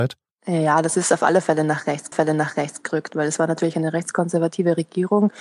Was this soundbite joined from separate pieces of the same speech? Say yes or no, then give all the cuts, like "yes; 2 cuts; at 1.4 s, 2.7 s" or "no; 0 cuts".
yes; 1 cut; at 2.1 s